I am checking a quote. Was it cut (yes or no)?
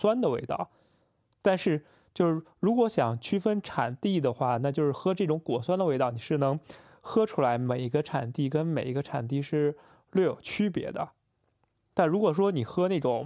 no